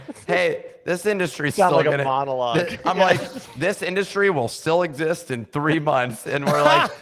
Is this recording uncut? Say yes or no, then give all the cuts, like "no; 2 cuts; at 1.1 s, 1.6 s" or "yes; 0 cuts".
yes; 0 cuts